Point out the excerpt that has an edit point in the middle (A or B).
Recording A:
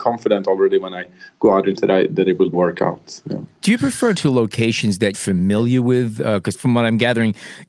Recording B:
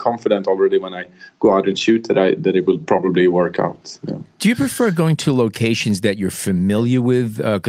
A